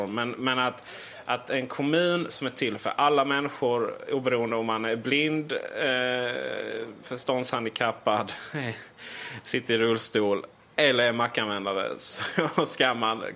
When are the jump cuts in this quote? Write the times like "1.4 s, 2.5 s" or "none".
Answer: none